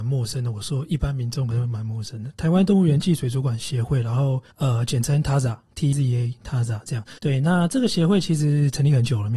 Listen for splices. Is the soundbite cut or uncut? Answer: cut